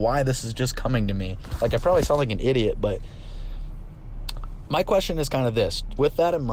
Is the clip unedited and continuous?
yes; 0 cuts

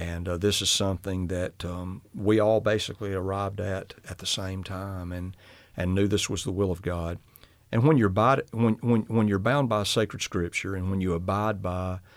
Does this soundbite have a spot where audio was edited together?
no; 0 cuts

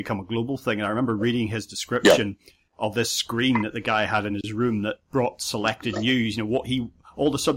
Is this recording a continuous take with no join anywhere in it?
yes; 0 cuts

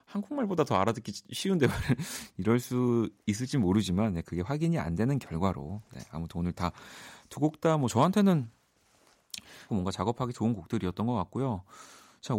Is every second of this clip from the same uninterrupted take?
no; 2 cuts; at 9.7 s, 10.3 s

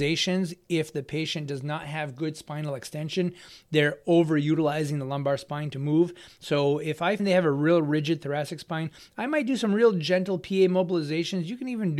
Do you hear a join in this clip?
yes; 1 cut; at 7.2 s

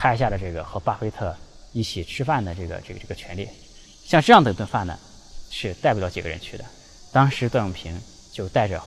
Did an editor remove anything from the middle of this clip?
yes; 1 cut; at 3.9 s

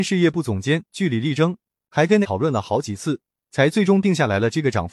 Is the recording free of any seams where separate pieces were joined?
no; 1 cut; at 2.2 s

